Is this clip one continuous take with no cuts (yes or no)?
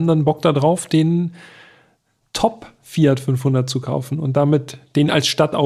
yes